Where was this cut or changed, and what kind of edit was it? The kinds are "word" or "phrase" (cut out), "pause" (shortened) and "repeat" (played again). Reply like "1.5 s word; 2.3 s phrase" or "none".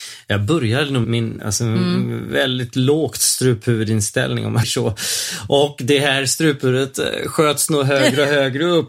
1.0 s word; 1.4 s phrase; 4.6 s word